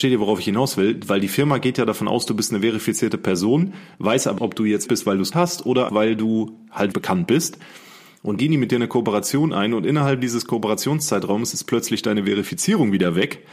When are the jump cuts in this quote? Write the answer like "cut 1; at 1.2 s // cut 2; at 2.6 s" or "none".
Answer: cut 1; at 4.4 s // cut 2; at 4.9 s // cut 3; at 5.3 s // cut 4; at 5.9 s // cut 5; at 6.9 s // cut 6; at 8.4 s